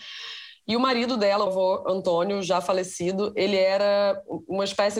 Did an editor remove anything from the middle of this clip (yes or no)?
yes